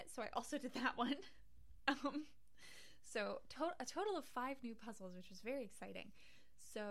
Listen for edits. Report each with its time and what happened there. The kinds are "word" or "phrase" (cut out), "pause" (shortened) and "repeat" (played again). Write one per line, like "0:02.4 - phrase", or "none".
none